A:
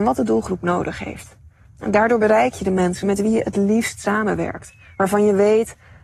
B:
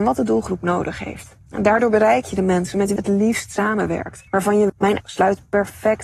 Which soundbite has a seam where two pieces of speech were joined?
B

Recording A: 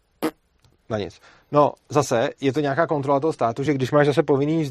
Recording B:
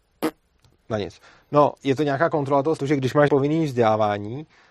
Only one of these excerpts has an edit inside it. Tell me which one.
B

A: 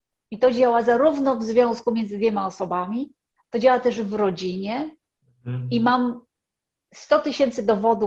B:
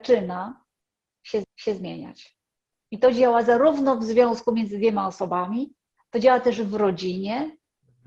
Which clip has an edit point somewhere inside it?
B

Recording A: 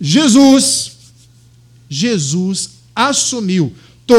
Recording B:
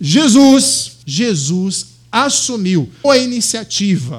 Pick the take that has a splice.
B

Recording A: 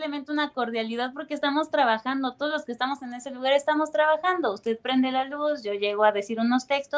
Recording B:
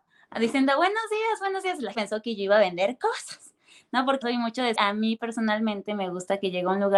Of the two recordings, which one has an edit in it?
B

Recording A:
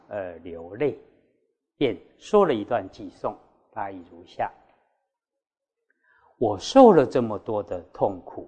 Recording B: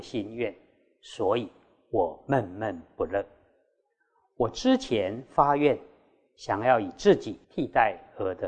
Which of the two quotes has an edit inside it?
B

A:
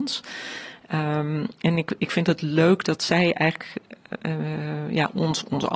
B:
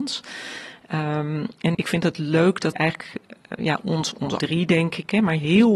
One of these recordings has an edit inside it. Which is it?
B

